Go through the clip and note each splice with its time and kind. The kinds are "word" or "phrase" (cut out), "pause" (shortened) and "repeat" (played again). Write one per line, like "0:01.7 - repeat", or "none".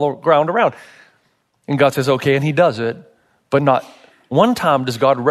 none